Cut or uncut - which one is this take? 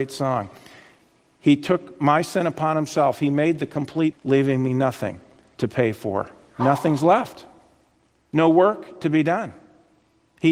cut